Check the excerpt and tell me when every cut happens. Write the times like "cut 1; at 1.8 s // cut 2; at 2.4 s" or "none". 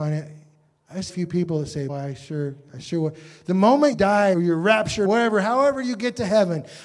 cut 1; at 1.1 s // cut 2; at 1.9 s // cut 3; at 3.9 s // cut 4; at 4.3 s // cut 5; at 5.0 s